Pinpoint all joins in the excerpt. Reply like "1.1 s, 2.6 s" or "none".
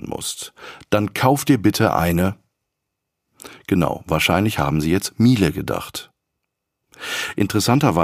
none